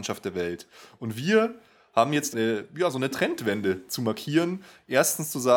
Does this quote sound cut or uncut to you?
cut